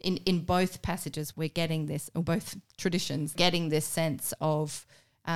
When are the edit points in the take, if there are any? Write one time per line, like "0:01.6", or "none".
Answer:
0:01.3
0:03.3